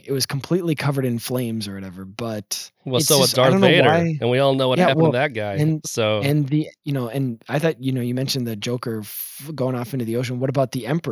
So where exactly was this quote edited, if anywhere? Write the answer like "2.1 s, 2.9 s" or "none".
none